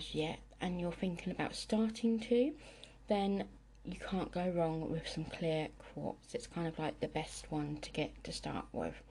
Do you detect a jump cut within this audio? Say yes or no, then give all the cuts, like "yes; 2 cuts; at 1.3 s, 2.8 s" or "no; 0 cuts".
no; 0 cuts